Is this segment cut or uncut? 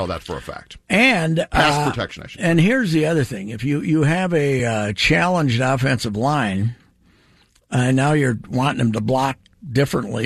uncut